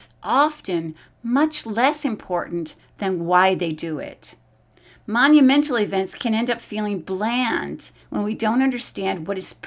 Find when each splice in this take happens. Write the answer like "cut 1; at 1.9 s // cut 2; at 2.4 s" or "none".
none